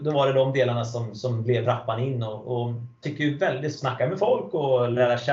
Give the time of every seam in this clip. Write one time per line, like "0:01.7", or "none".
0:01.6
0:03.0
0:03.8